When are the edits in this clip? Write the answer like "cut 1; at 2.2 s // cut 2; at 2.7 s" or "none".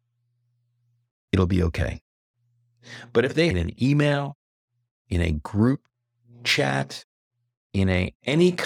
cut 1; at 3.5 s